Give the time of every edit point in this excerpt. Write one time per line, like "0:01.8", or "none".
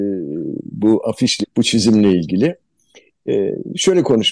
0:01.4